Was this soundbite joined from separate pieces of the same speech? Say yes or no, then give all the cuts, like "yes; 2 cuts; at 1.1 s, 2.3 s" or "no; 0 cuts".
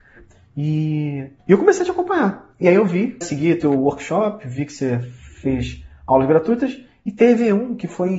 yes; 2 cuts; at 1.4 s, 3.2 s